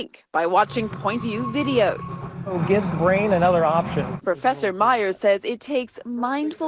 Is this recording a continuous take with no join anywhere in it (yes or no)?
no